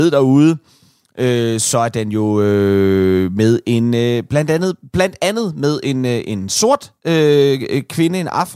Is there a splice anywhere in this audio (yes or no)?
yes